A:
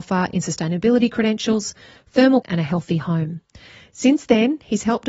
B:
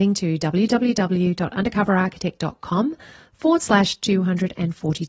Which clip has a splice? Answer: A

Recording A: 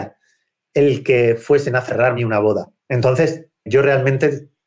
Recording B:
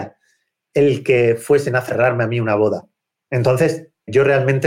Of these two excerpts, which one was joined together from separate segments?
A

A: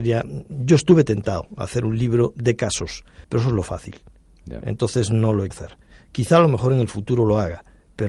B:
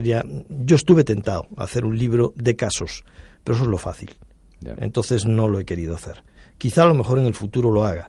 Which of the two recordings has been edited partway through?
A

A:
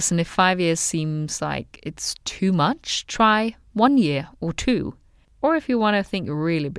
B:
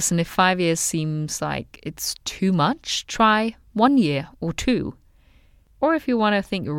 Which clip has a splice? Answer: A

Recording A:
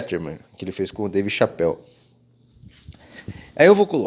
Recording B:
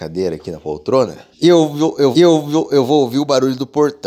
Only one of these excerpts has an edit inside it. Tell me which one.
B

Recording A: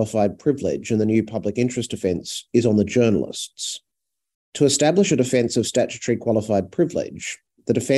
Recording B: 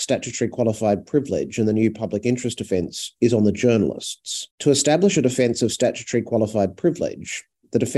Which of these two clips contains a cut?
B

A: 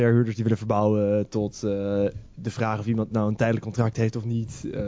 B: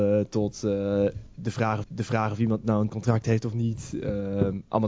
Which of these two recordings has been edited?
B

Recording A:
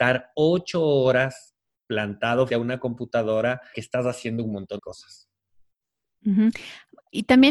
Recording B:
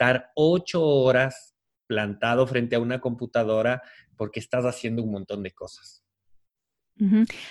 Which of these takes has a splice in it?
A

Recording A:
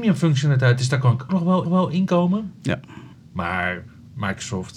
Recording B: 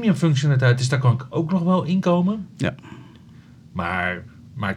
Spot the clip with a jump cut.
A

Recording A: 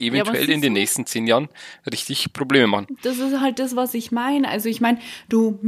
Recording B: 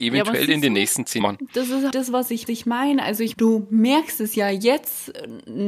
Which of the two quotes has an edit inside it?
B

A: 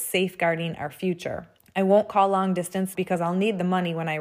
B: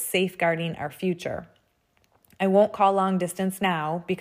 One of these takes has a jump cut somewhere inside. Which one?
A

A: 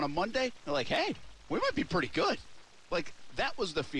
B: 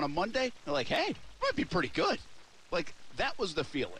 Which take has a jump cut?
B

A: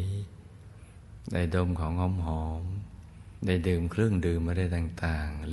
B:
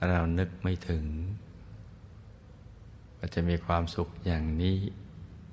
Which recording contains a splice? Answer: A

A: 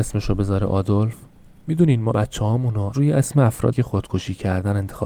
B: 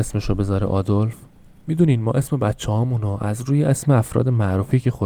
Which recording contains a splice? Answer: A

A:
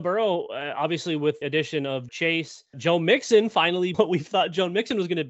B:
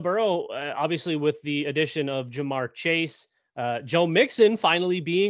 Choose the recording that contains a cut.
A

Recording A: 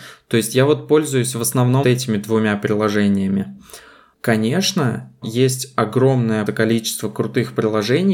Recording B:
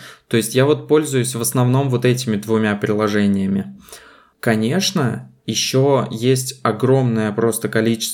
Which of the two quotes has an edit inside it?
A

